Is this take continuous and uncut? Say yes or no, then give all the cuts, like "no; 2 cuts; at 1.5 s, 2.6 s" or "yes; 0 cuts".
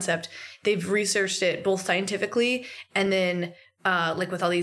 yes; 0 cuts